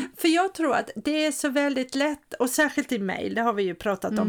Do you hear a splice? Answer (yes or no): no